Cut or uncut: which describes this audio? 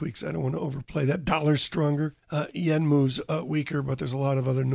cut